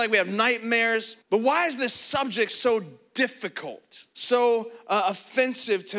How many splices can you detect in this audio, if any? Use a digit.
2